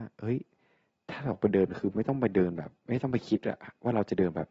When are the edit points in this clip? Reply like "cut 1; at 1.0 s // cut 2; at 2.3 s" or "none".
cut 1; at 2.8 s